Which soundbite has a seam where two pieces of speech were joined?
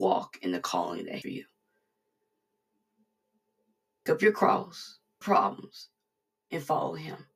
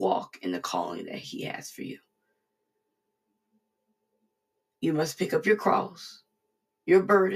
first; 3 cuts; at 1.2 s, 4.1 s, 5.2 s

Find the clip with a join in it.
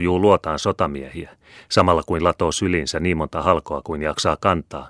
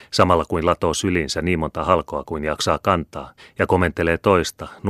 second; 1 cut; at 3.4 s

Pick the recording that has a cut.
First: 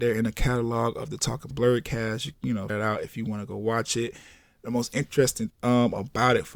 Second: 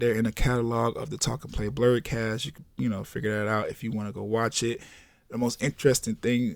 first; 4 cuts; at 1.5 s, 2.3 s, 2.7 s, 5.5 s

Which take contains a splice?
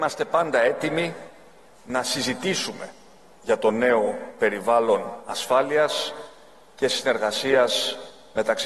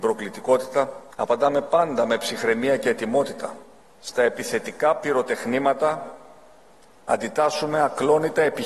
second; 2 cuts; at 1.1 s, 3.8 s

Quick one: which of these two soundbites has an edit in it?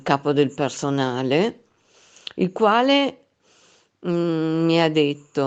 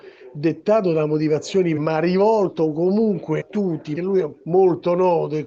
second; 4 cuts; at 1.8 s, 3.4 s, 3.9 s, 4.4 s

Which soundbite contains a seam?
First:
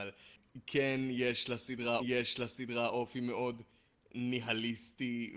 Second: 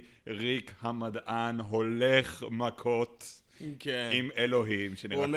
first; 1 cut; at 2.0 s

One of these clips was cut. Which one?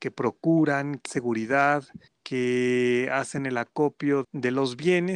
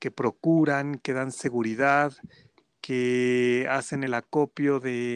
first; 3 cuts; at 1.1 s, 2.1 s, 4.2 s

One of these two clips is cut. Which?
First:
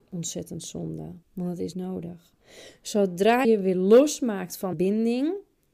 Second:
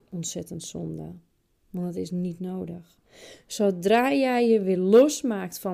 first; 4 cuts; at 1.2 s, 1.7 s, 3.4 s, 4.7 s

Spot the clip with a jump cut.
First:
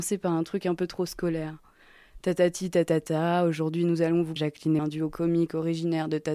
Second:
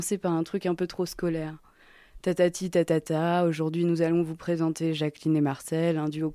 first; 2 cuts; at 4.4 s, 4.8 s

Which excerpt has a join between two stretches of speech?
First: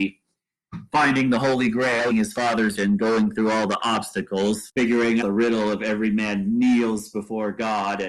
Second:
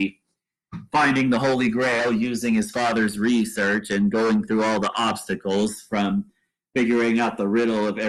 first; 4 cuts; at 2.1 s, 2.8 s, 4.7 s, 5.2 s

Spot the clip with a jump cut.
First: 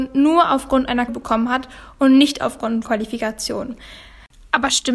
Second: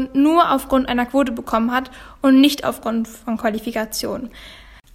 first; 2 cuts; at 1.1 s, 2.8 s

